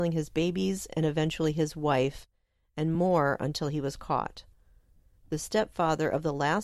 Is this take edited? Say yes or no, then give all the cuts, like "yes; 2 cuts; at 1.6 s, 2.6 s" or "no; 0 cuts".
no; 0 cuts